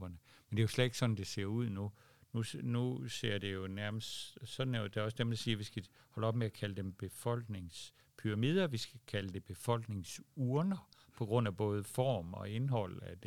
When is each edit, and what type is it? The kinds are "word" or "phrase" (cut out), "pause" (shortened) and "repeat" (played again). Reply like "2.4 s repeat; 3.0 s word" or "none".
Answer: none

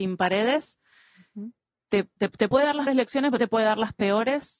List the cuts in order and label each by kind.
2.2 s word; 2.9 s word; 3.4 s word

